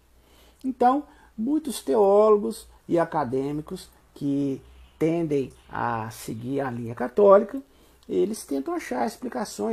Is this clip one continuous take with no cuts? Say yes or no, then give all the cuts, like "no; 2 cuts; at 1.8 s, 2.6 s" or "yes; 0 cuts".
yes; 0 cuts